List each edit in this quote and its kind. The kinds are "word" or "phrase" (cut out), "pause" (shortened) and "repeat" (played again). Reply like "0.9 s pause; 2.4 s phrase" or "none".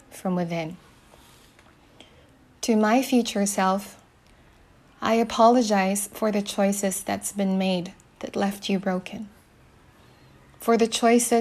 none